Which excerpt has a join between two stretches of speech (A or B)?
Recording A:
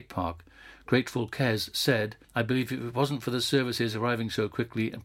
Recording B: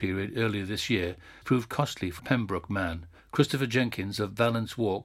B